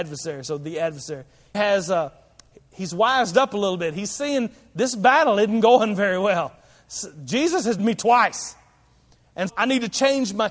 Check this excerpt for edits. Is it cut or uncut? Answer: cut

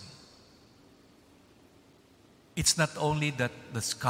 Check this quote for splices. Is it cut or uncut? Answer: uncut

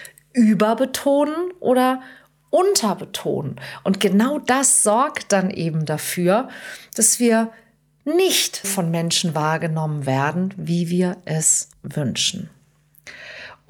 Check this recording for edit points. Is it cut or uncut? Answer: cut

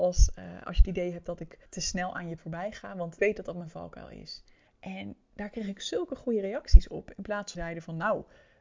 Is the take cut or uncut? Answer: cut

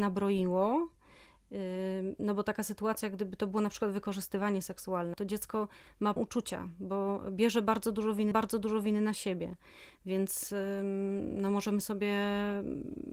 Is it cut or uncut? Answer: cut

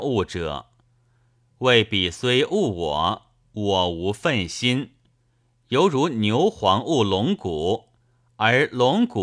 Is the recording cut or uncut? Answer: uncut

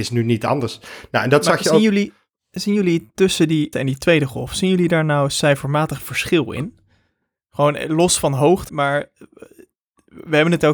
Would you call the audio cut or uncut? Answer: cut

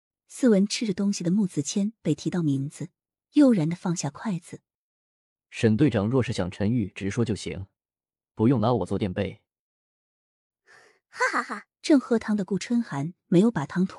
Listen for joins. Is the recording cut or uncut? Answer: cut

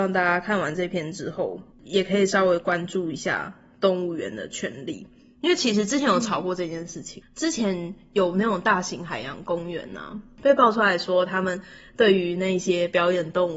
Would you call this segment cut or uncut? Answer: cut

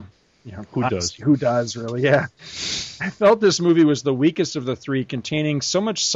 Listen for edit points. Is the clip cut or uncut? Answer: uncut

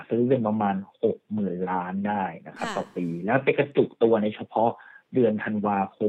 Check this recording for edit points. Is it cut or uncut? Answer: cut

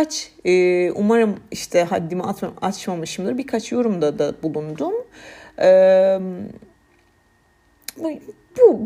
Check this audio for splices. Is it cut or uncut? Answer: cut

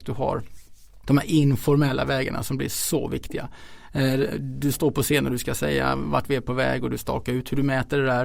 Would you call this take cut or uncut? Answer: cut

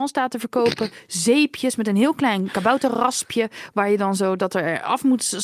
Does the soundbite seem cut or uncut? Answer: uncut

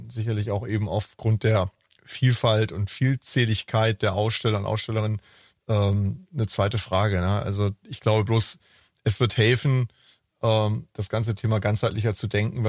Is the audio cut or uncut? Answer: uncut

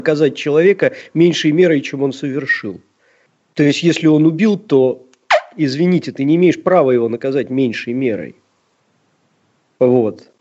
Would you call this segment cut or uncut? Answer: uncut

